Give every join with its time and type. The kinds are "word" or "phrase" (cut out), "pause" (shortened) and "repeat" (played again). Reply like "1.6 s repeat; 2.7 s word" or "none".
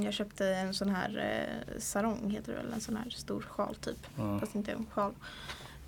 none